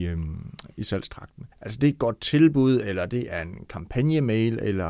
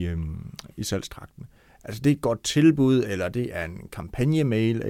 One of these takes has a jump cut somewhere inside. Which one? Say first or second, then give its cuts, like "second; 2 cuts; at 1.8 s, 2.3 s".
first; 1 cut; at 1.5 s